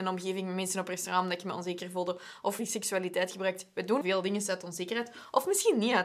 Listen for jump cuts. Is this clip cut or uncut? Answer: cut